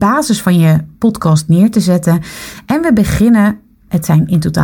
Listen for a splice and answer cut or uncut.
cut